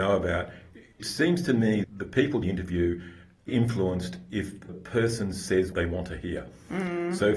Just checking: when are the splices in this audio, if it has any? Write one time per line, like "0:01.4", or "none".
0:01.0
0:01.8
0:02.4
0:03.5
0:04.7
0:05.7